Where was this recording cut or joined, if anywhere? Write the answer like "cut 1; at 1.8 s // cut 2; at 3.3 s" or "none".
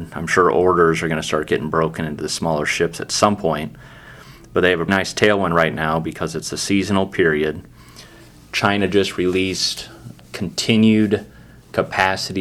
cut 1; at 4.9 s